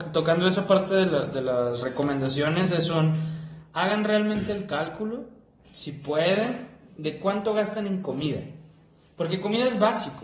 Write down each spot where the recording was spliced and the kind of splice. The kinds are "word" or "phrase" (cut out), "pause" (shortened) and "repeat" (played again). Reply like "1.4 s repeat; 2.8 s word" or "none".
none